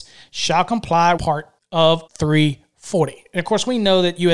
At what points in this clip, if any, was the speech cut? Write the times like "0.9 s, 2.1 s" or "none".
1.2 s, 1.6 s, 2.1 s